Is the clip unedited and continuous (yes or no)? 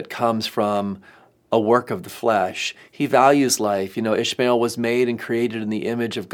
yes